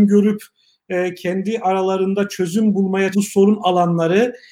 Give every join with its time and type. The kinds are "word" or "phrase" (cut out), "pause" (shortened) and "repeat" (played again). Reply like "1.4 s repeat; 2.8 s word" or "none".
3.1 s word